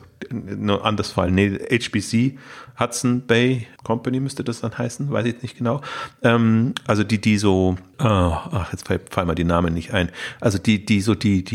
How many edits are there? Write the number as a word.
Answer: zero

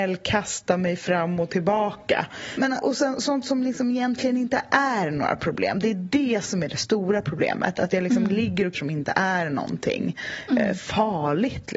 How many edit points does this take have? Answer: two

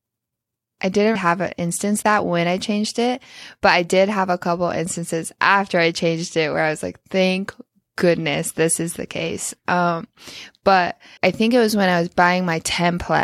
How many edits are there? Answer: three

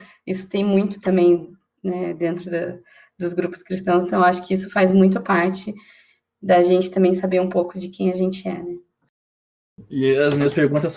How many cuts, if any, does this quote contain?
zero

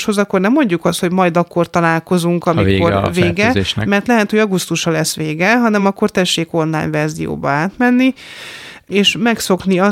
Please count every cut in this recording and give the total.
zero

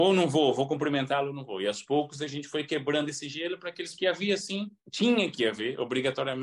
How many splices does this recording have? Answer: two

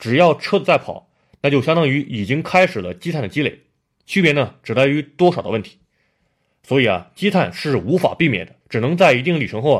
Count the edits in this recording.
one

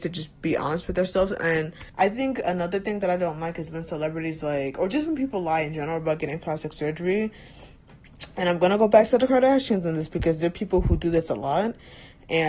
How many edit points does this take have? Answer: one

